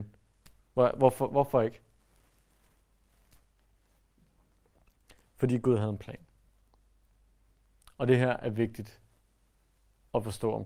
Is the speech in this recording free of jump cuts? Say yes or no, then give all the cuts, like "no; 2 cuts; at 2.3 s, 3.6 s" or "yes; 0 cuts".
yes; 0 cuts